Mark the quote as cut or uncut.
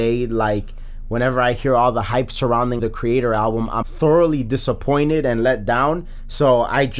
cut